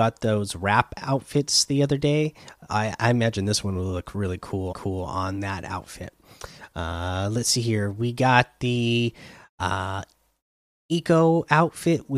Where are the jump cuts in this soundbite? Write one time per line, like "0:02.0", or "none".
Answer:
0:04.7